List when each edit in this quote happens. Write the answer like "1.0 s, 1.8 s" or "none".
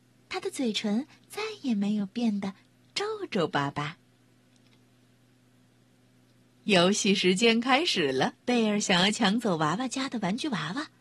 8.4 s

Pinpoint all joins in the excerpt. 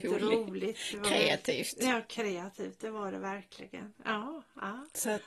none

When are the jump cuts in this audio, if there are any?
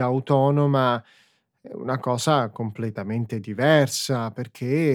none

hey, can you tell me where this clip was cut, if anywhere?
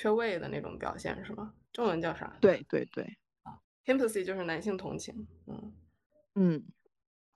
1.6 s

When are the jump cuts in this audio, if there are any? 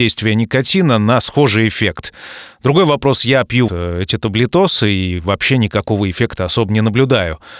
3.7 s

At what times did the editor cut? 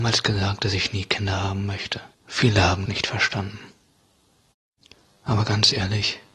2.1 s, 2.9 s

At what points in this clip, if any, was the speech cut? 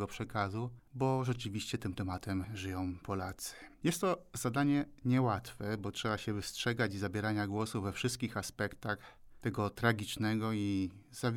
3.7 s

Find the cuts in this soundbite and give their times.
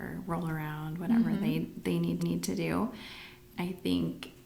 2.2 s

